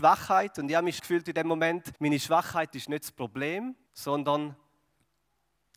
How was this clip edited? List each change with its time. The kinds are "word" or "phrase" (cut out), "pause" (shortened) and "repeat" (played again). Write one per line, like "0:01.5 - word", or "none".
0:01.0 - word
0:02.0 - pause
0:03.9 - pause